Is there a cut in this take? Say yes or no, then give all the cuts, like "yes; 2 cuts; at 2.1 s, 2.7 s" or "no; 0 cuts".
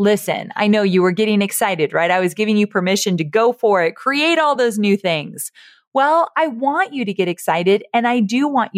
no; 0 cuts